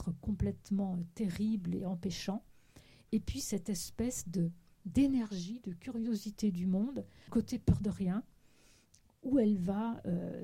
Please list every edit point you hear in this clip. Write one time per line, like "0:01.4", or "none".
0:01.8
0:07.3